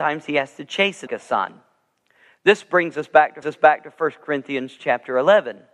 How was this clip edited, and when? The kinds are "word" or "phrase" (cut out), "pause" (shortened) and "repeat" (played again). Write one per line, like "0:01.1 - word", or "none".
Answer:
0:01.1 - phrase
0:03.4 - repeat